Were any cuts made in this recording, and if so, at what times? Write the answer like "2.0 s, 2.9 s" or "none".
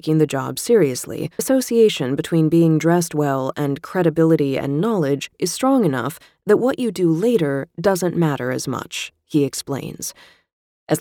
1.4 s